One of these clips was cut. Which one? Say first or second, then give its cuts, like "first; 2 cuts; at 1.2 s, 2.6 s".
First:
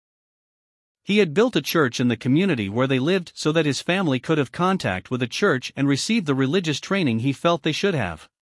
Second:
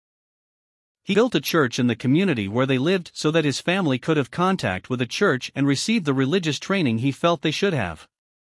second; 1 cut; at 1.1 s